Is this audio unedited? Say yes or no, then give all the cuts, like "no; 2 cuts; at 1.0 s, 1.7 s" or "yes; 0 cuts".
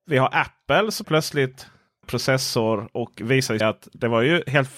no; 3 cuts; at 1.0 s, 2.0 s, 3.6 s